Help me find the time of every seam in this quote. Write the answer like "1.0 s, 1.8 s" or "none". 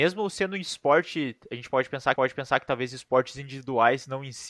2.2 s